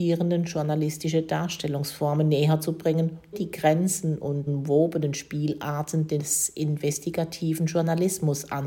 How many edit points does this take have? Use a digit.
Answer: 2